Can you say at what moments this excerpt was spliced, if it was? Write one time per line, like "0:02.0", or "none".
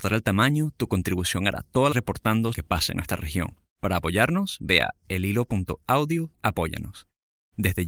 0:01.9
0:02.5
0:03.7
0:06.3